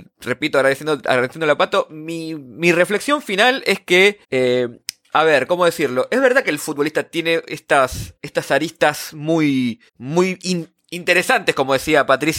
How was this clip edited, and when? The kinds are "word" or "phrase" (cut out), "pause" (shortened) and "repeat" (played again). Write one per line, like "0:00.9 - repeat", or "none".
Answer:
0:04.2 - pause
0:08.2 - pause
0:09.9 - pause